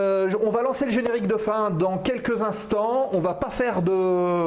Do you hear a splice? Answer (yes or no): no